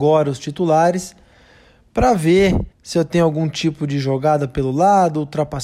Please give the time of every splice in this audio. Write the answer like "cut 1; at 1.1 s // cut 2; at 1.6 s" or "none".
cut 1; at 2.7 s